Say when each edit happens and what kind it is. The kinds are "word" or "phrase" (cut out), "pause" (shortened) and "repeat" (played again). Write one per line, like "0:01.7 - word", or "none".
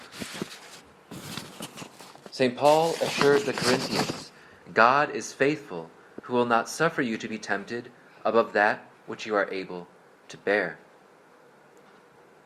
none